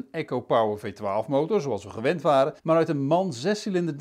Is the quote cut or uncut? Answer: cut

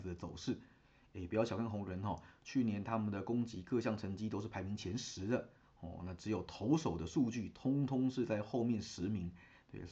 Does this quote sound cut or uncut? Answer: uncut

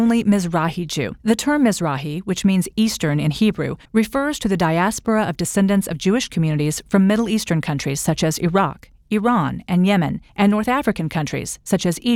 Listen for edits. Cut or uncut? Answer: cut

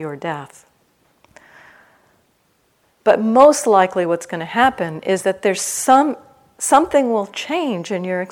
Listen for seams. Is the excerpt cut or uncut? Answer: uncut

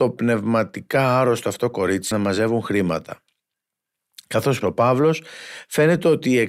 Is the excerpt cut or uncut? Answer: cut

